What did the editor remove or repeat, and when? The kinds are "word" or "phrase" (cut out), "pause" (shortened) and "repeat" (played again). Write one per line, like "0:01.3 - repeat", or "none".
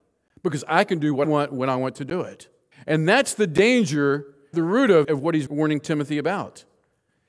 0:01.2 - word
0:02.7 - pause
0:04.5 - word
0:05.0 - word
0:05.5 - word